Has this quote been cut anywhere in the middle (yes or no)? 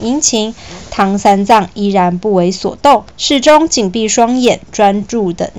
yes